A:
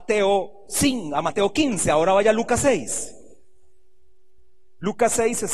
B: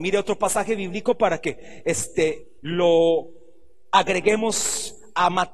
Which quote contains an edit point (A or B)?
B